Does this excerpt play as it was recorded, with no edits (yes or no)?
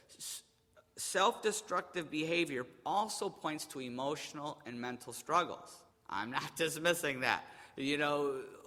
no